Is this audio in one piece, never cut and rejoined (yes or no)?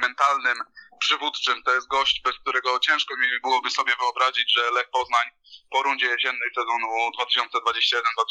yes